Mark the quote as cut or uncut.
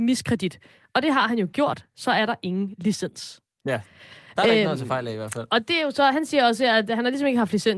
uncut